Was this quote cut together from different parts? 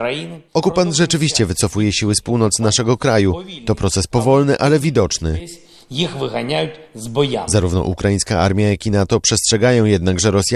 no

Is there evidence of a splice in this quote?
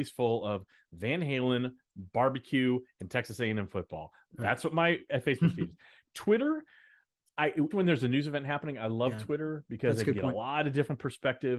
yes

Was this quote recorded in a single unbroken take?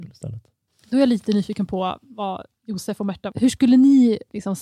yes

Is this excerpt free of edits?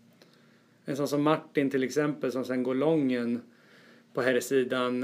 yes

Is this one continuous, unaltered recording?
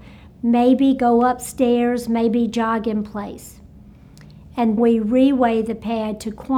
no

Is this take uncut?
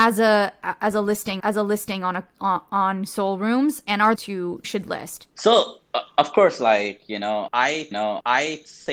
no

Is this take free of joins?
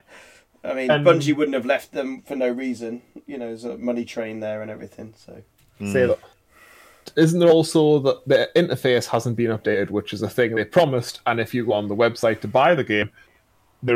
yes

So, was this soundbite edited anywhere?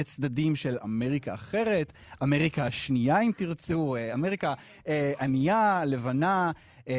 no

